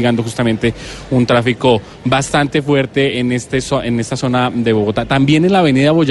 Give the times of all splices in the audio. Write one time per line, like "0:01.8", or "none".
none